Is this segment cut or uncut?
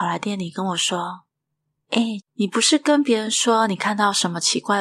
cut